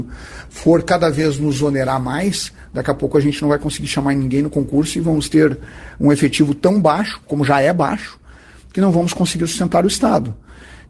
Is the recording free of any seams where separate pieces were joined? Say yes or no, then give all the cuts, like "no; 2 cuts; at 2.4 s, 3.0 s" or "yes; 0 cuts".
yes; 0 cuts